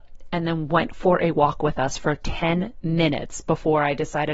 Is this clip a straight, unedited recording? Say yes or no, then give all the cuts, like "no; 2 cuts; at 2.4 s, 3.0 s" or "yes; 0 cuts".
yes; 0 cuts